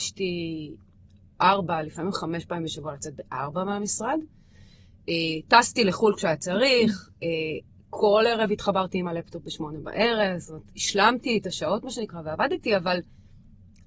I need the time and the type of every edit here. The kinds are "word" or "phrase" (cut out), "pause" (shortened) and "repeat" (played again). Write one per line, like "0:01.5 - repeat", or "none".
none